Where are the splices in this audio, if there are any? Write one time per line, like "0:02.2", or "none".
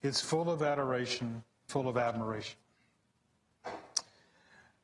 0:01.7